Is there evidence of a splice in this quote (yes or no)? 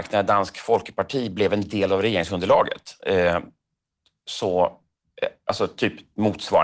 no